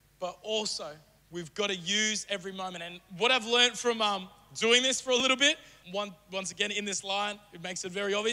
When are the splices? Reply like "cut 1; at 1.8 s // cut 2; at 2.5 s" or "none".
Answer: cut 1; at 1.2 s // cut 2; at 5.8 s